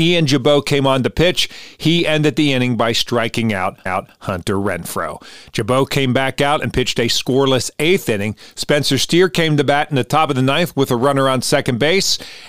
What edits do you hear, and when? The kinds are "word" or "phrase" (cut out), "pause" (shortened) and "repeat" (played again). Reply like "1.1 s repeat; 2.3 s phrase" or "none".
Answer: 3.9 s repeat